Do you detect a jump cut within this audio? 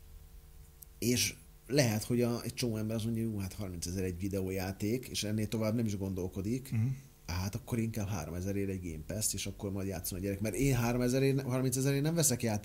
no; 0 cuts

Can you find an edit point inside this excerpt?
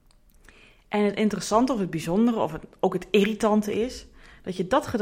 no; 0 cuts

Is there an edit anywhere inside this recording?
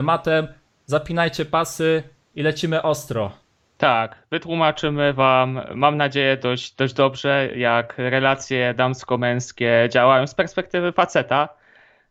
no; 0 cuts

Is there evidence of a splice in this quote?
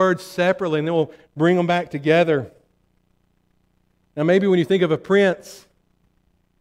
no; 0 cuts

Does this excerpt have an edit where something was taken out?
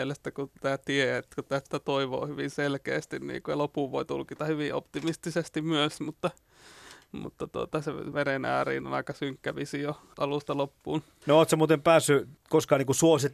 yes; 1 cut; at 1.7 s

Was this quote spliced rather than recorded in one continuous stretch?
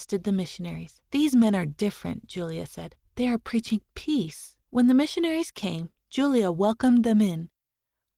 yes; 3 cuts; at 1.1 s, 3.1 s, 4.6 s

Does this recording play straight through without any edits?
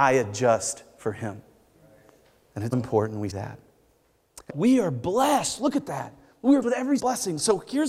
no; 5 cuts; at 2.7 s, 3.3 s, 4.5 s, 6.6 s, 7.0 s

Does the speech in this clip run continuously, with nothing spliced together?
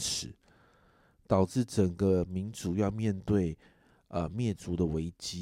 yes; 0 cuts

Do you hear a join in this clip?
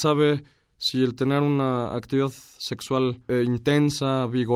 no; 0 cuts

